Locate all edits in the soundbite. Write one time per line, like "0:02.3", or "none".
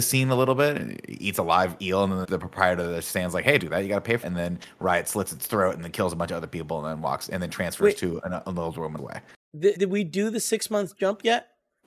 0:02.2
0:03.6
0:04.2
0:09.0
0:09.8

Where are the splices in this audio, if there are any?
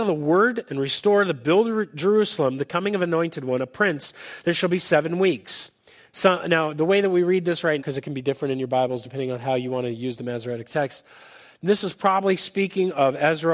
0:07.8

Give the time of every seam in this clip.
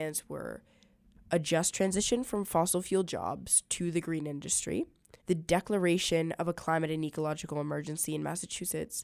0:05.2

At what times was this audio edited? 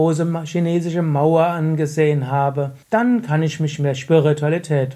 0:02.8

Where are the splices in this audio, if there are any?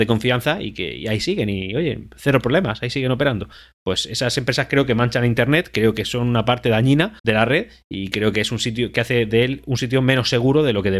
0:07.2

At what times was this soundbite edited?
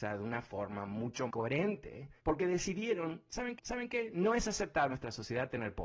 0:01.3
0:02.2
0:03.6
0:04.9

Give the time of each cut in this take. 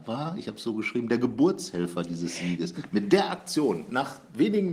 none

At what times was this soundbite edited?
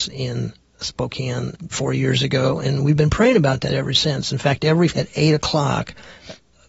0:01.7
0:04.9

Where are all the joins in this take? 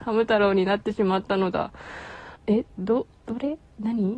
0:02.4
0:03.1

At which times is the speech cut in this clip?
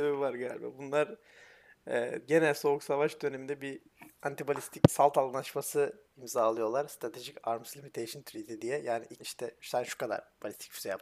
0:04.9
0:06.1
0:09.2

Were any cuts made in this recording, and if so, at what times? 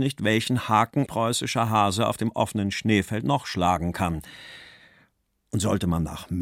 0:01.1

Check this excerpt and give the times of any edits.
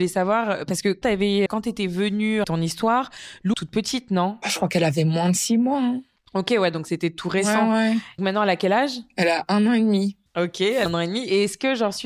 0:01.0
0:01.5
0:02.4
0:03.5
0:06.2
0:08.2
0:10.3
0:10.9

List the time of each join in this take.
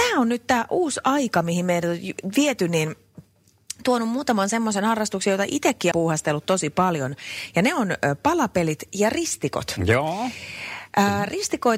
0:05.9

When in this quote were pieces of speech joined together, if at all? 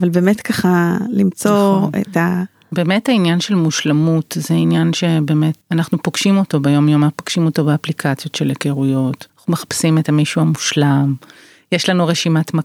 0:09.3

